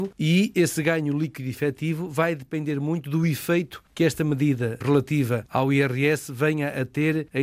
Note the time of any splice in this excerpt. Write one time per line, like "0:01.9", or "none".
0:04.8

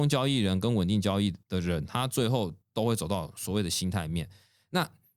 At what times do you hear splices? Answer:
0:01.4
0:02.6

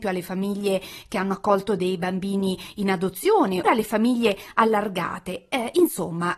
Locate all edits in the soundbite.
0:03.6

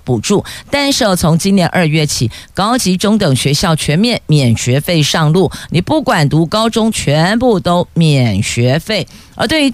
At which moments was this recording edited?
0:06.9

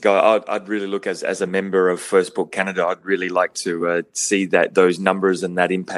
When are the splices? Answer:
none

